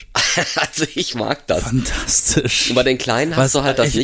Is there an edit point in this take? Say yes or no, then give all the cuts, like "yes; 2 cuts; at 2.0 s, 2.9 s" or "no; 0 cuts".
no; 0 cuts